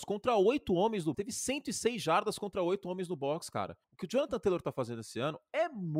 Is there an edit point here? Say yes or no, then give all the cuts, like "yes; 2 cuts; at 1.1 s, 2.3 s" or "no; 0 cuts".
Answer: yes; 2 cuts; at 1.1 s, 3.8 s